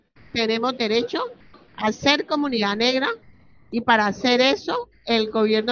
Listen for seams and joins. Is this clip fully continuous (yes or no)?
yes